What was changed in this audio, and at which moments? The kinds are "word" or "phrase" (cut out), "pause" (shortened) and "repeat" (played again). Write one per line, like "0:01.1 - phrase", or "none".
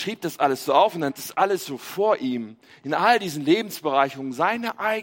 0:01.1 - word